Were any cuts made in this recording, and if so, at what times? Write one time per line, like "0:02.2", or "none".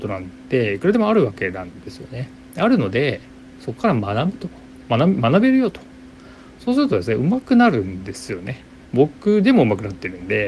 none